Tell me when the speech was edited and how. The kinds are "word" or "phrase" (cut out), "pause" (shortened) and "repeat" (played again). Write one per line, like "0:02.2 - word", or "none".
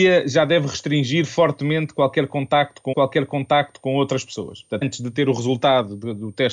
0:02.9 - repeat
0:04.8 - word